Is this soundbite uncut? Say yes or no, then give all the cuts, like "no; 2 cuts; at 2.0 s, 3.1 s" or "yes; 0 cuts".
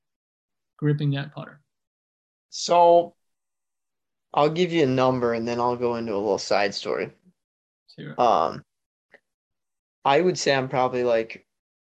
yes; 0 cuts